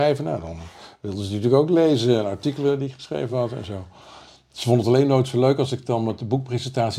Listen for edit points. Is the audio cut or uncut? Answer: uncut